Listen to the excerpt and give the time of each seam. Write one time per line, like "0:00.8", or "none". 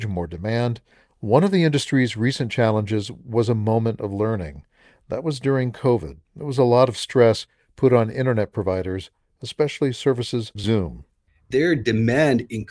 0:06.2
0:10.6